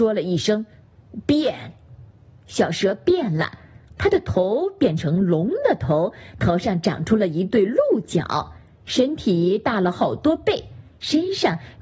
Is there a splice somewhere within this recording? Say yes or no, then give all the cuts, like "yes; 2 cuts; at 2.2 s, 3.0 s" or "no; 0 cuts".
no; 0 cuts